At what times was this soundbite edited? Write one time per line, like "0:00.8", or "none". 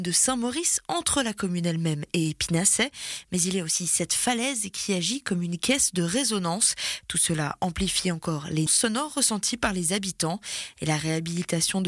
0:08.7